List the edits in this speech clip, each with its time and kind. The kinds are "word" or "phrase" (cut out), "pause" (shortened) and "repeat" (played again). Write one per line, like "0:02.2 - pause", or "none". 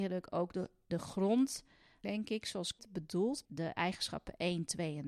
0:02.0 - word
0:02.8 - word
0:03.4 - word